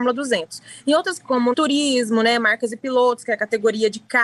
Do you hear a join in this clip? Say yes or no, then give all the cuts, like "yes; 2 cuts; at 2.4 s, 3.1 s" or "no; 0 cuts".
yes; 2 cuts; at 1.2 s, 1.5 s